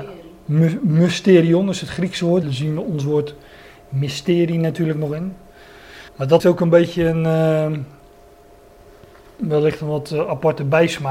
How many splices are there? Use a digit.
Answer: 3